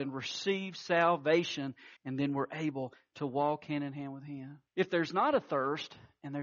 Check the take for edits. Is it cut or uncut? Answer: cut